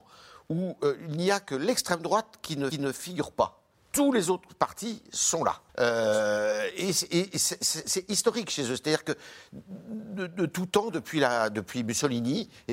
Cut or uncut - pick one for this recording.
cut